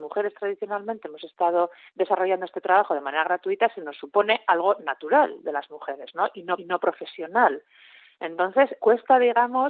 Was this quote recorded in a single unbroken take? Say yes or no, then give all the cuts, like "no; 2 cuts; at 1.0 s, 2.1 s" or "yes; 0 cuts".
no; 3 cuts; at 1.9 s, 6.6 s, 8.8 s